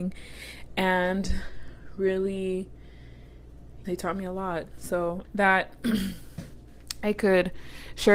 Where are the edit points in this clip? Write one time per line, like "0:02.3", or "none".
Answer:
0:03.8
0:05.2